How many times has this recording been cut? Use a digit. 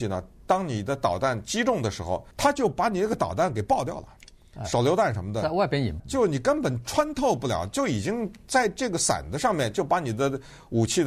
2